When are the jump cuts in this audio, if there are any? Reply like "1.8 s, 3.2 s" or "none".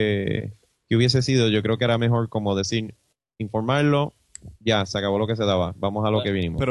3.1 s